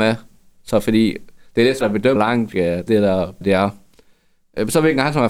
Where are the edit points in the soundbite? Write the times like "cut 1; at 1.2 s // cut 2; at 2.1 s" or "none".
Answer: cut 1; at 1.8 s // cut 2; at 2.2 s // cut 3; at 2.9 s // cut 4; at 3.4 s